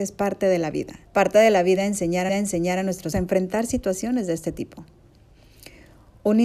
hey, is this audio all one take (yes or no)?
no